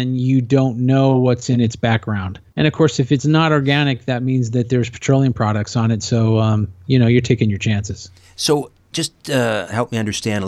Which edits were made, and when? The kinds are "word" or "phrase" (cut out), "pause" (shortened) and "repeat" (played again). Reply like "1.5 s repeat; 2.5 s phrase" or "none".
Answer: 2.5 s pause

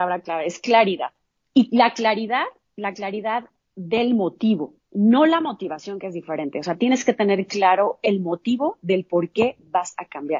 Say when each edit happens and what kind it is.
none

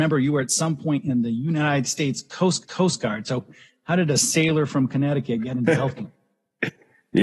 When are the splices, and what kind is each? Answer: 2.6 s repeat

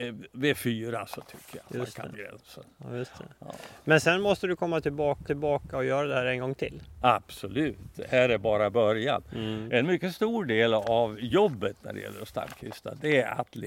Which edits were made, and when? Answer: 2.1 s word; 5.3 s repeat

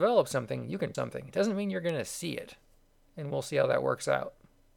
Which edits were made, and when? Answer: 0.9 s word

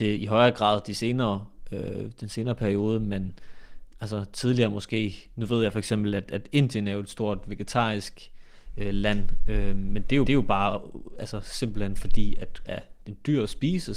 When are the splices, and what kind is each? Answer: 10.3 s repeat; 12.7 s word; 13.0 s word

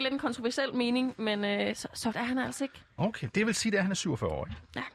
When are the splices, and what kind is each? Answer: 2.1 s word

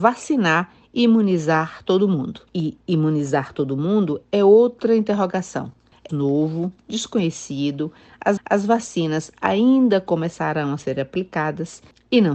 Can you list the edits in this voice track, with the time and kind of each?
2.5 s pause; 6.1 s phrase; 8.4 s repeat

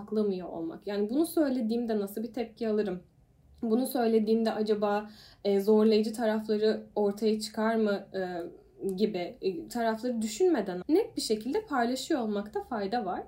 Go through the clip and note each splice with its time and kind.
10.8 s word

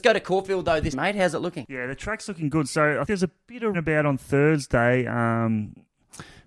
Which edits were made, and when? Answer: 0.9 s word; 3.0 s word; 3.7 s word

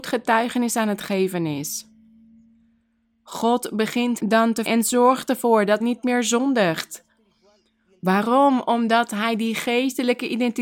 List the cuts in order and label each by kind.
4.2 s word; 4.7 s word; 5.8 s word

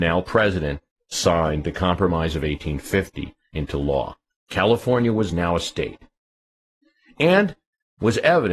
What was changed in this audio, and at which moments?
none

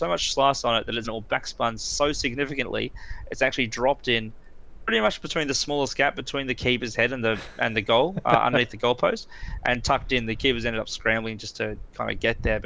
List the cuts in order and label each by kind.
1.0 s phrase

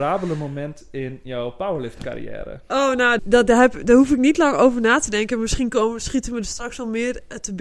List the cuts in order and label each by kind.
3.2 s word

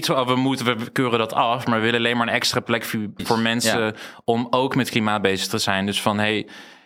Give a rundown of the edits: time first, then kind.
3.2 s word

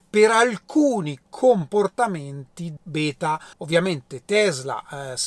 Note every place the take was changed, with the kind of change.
2.8 s word; 3.5 s pause

